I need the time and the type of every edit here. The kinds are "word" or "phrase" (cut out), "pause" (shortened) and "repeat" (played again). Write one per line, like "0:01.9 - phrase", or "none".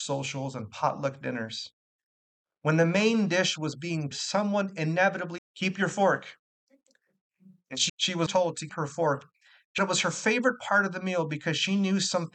0:04.1 - word
0:05.4 - word
0:07.9 - word
0:08.3 - word
0:08.7 - word
0:09.8 - word